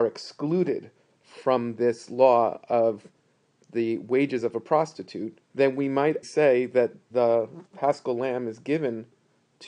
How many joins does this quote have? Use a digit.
3